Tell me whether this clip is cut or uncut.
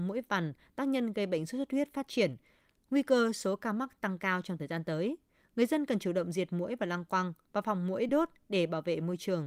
uncut